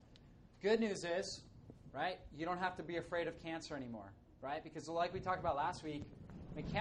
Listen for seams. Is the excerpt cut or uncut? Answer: uncut